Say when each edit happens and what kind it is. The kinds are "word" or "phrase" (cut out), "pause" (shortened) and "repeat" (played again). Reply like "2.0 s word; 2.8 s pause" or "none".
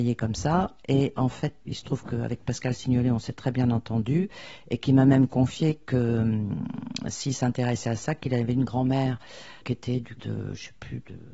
1.7 s word; 9.6 s word; 10.2 s word